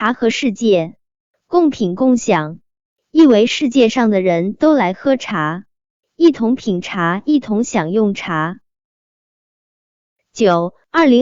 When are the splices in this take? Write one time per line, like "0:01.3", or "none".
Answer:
none